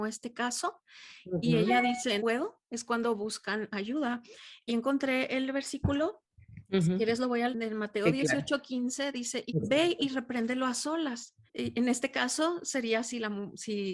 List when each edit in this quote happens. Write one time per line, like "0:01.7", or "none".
0:02.2
0:04.7
0:07.5
0:09.5
0:11.5